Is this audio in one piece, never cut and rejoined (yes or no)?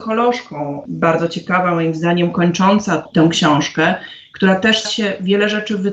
no